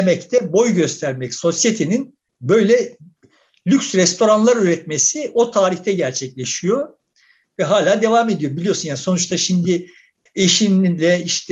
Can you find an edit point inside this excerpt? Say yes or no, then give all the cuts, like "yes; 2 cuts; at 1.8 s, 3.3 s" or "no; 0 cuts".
no; 0 cuts